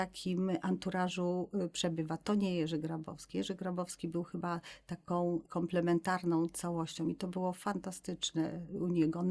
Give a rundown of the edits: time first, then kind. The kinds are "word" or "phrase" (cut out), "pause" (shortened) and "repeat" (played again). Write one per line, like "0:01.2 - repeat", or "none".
none